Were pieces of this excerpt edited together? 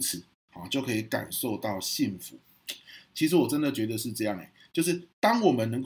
no; 0 cuts

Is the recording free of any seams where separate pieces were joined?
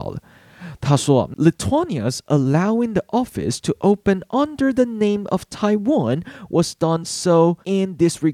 yes; 0 cuts

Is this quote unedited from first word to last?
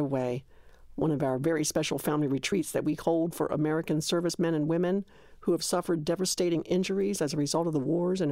yes; 0 cuts

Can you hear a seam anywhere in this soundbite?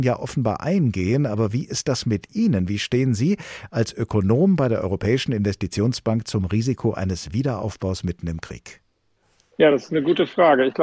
no; 0 cuts

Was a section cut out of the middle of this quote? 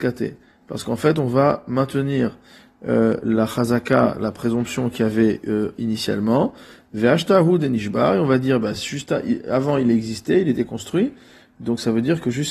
no; 0 cuts

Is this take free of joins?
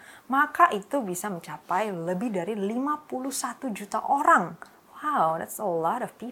no; 1 cut; at 4.7 s

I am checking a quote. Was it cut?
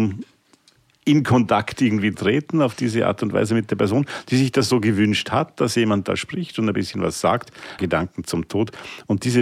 yes; 2 cuts; at 2.1 s, 7.8 s

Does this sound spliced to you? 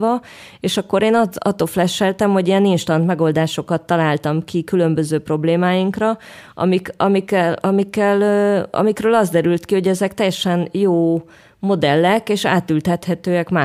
no; 0 cuts

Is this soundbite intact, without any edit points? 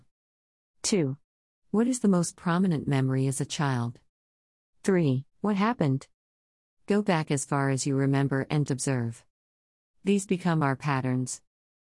no; 2 cuts; at 5.3 s, 8.7 s

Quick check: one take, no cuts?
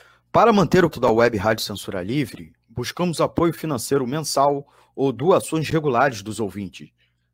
no; 1 cut; at 0.9 s

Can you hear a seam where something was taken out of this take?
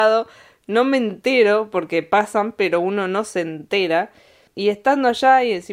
no; 0 cuts

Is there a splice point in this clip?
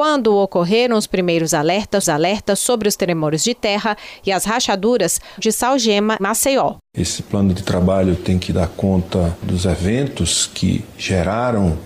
yes; 3 cuts; at 2.0 s, 5.4 s, 6.2 s

